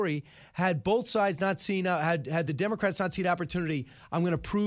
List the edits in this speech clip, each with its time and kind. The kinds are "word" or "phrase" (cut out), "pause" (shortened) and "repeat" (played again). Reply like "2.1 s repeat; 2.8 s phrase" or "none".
none